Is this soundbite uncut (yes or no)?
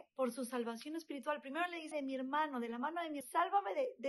no